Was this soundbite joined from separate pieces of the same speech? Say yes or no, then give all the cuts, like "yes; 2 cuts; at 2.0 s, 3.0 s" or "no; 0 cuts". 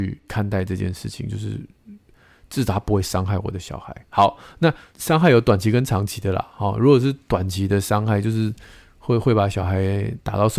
no; 0 cuts